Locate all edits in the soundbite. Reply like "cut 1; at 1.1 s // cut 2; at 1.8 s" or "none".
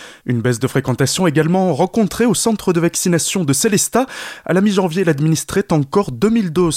none